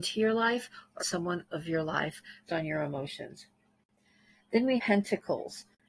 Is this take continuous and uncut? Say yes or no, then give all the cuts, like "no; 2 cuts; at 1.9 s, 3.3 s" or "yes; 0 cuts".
no; 4 cuts; at 1.0 s, 1.5 s, 2.5 s, 4.8 s